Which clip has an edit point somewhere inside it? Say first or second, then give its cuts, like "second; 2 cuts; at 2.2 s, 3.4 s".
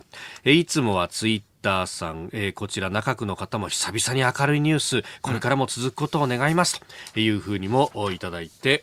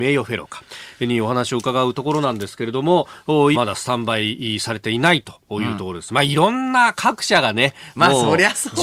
second; 1 cut; at 3.5 s